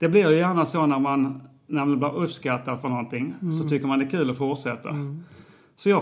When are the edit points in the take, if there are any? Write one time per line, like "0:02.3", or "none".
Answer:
none